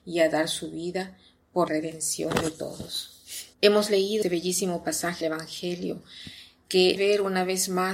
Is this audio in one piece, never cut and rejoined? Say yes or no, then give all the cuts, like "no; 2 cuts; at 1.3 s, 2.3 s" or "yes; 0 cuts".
no; 5 cuts; at 1.7 s, 3.5 s, 4.2 s, 5.2 s, 7.0 s